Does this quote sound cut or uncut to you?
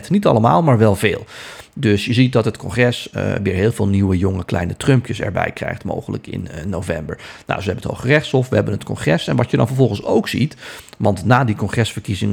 uncut